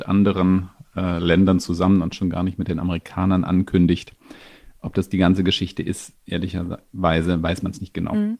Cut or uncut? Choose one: uncut